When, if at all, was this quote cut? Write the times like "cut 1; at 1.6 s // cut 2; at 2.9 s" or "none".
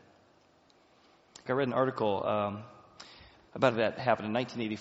cut 1; at 1.5 s // cut 2; at 3.7 s